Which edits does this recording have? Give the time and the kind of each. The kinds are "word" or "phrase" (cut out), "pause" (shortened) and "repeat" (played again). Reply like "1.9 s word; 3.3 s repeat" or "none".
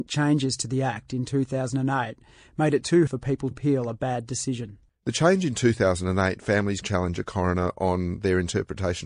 3.1 s word; 3.5 s word; 6.4 s word; 6.8 s word